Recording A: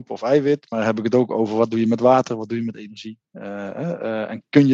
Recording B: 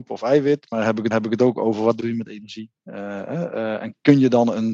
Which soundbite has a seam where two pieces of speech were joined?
B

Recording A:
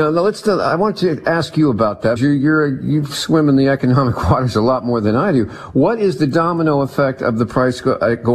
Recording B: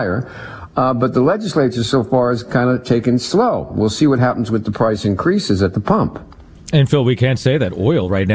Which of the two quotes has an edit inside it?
A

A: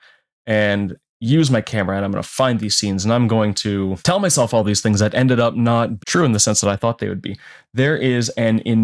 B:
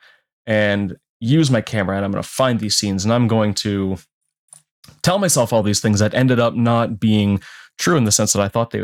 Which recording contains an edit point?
A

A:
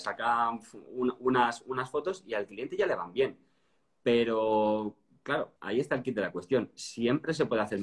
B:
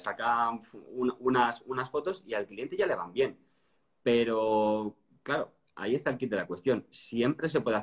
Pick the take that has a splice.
A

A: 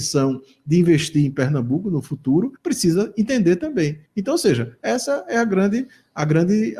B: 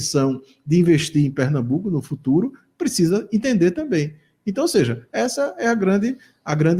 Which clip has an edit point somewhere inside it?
A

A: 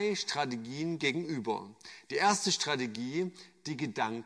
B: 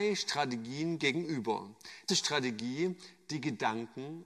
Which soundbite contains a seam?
B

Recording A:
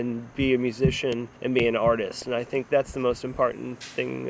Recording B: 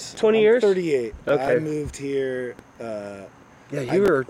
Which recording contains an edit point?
A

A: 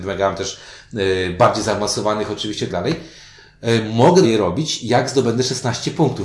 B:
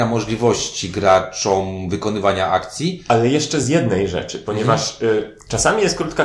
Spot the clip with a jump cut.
A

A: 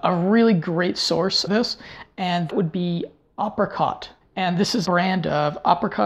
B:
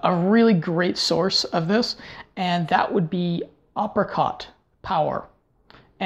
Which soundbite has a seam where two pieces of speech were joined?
A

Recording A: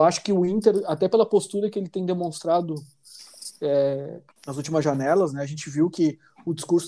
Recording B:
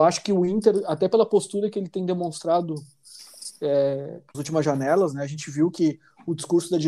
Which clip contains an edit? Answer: B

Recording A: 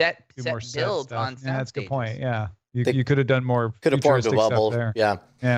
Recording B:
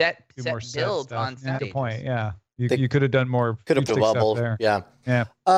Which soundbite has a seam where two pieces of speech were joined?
B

